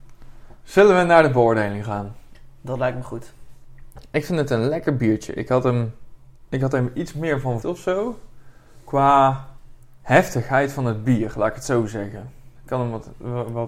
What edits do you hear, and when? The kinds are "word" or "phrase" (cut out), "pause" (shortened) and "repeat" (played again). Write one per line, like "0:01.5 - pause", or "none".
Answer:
0:07.6 - word